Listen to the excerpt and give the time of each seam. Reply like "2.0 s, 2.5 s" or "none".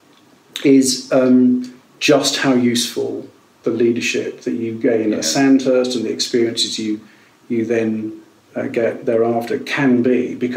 none